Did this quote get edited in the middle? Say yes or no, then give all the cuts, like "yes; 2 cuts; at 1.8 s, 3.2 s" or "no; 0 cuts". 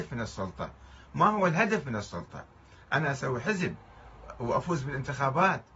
no; 0 cuts